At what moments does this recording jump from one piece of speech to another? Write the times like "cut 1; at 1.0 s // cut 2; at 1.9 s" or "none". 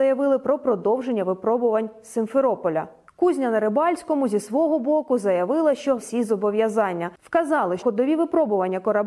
cut 1; at 6.0 s // cut 2; at 7.8 s